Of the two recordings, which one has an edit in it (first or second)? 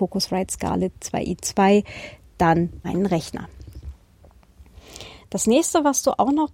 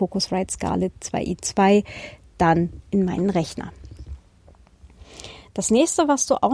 first